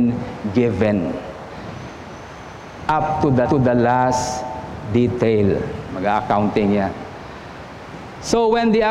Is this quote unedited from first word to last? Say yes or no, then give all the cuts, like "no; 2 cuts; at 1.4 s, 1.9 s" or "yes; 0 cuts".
no; 1 cut; at 3.4 s